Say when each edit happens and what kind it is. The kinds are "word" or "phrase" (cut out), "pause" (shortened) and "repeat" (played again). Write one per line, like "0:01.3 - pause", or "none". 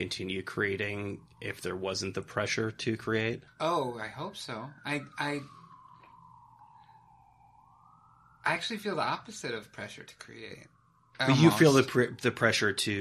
none